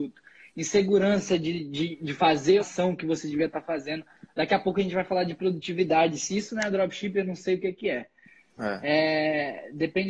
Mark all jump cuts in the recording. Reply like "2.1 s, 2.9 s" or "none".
2.6 s